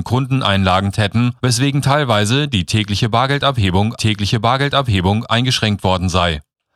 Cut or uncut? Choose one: cut